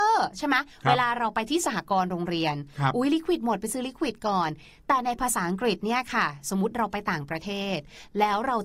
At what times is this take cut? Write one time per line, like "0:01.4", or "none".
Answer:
none